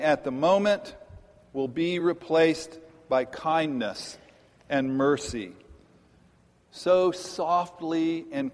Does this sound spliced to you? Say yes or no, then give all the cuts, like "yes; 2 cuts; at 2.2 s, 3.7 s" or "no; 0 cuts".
no; 0 cuts